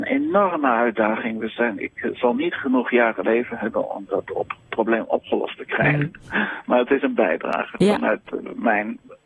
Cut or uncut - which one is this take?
cut